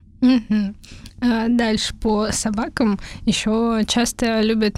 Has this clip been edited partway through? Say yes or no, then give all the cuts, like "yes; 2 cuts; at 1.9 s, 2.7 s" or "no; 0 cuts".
no; 0 cuts